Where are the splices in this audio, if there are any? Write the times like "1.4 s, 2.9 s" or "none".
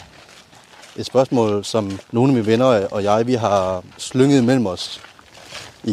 2.0 s, 3.9 s